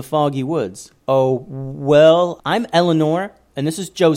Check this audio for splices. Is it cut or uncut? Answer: cut